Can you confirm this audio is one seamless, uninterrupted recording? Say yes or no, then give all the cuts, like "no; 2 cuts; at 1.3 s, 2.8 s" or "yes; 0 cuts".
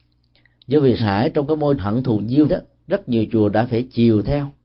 no; 3 cuts; at 1.0 s, 1.8 s, 2.5 s